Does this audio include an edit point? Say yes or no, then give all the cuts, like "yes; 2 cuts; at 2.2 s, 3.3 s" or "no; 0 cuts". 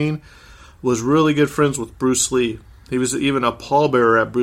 no; 0 cuts